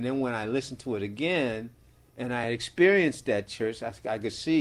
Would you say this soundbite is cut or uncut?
uncut